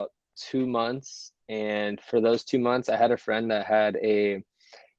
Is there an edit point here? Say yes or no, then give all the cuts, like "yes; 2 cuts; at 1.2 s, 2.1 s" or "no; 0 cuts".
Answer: yes; 1 cut; at 1.4 s